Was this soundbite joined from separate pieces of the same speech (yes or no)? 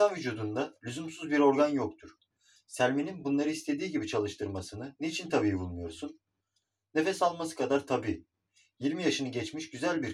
no